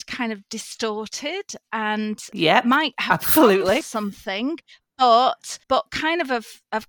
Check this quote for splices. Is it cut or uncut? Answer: cut